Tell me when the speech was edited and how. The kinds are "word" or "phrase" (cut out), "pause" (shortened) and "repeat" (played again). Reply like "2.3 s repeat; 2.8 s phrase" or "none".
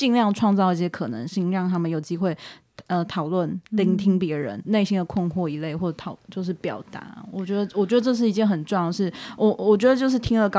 3.7 s pause; 4.6 s word